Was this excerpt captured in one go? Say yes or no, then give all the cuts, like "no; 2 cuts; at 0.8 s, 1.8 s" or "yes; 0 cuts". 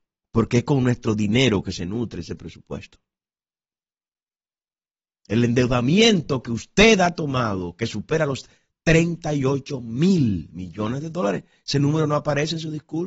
yes; 0 cuts